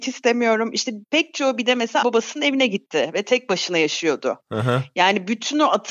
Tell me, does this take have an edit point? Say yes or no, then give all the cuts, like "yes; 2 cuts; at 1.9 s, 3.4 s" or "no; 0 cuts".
yes; 1 cut; at 2.0 s